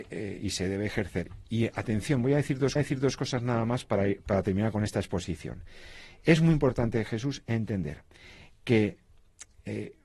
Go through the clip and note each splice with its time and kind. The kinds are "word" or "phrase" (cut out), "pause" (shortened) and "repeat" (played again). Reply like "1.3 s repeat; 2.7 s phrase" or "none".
2.8 s repeat